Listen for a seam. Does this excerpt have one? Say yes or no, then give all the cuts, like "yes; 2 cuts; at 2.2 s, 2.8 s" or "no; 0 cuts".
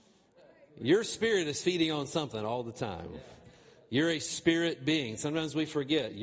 no; 0 cuts